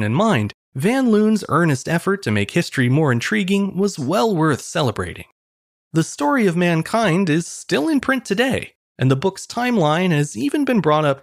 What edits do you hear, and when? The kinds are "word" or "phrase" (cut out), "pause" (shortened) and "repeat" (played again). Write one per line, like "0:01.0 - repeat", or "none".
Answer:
none